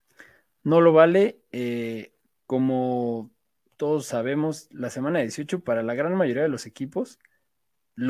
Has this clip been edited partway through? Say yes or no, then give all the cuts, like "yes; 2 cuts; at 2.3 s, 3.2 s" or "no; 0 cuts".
no; 0 cuts